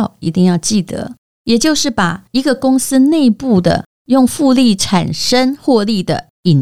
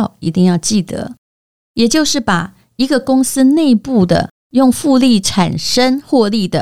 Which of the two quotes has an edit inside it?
first; 2 cuts; at 1.2 s, 2.3 s

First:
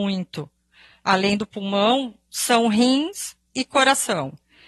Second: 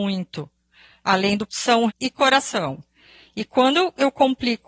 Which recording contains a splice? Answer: second; 2 cuts; at 1.5 s, 1.9 s

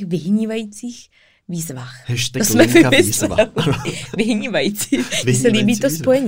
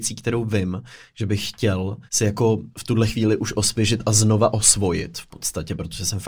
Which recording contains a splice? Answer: second; 2 cuts; at 2.1 s, 2.7 s

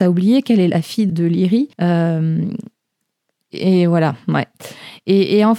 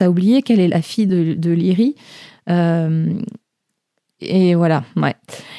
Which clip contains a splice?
first; 2 cuts; at 1.1 s, 1.7 s

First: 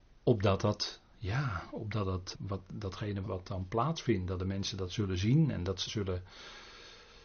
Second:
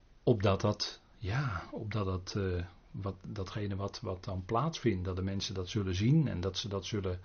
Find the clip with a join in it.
first; 3 cuts; at 2.3 s, 3.2 s, 5.9 s

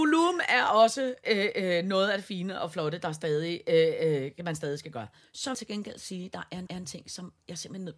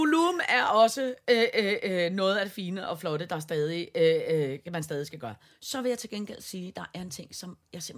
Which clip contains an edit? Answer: first; 3 cuts; at 1.2 s, 5.5 s, 6.7 s

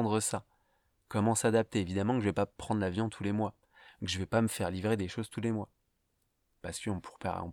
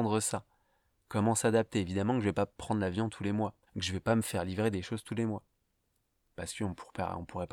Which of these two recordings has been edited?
second; 1 cut; at 3.7 s

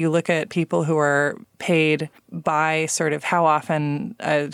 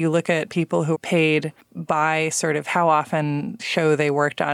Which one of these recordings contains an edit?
second; 2 cuts; at 0.9 s, 3.6 s

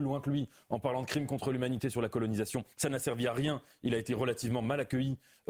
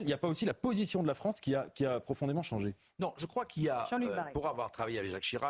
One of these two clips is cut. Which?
first; 1 cut; at 2.7 s

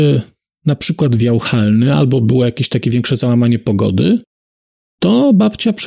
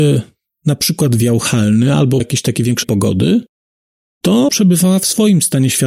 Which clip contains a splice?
second; 3 cuts; at 2.2 s, 2.8 s, 4.5 s

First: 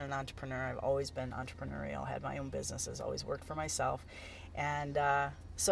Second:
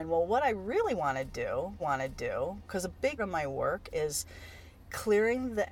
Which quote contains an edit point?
second; 2 cuts; at 1.8 s, 3.2 s

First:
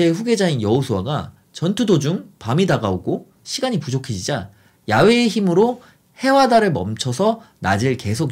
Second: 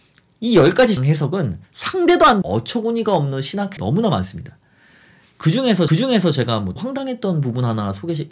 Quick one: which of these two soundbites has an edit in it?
second; 6 cuts; at 1.0 s, 1.6 s, 2.4 s, 3.8 s, 5.9 s, 6.8 s

